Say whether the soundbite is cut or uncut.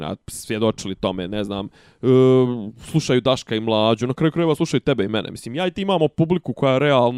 uncut